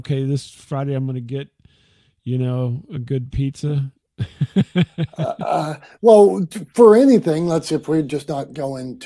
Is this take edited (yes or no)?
no